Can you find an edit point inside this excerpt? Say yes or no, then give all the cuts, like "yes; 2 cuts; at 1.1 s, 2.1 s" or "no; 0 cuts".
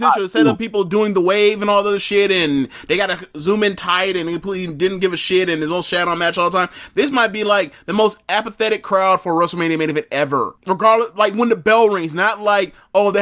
yes; 1 cut; at 10.6 s